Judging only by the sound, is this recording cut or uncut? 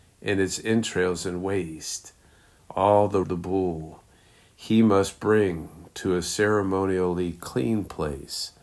cut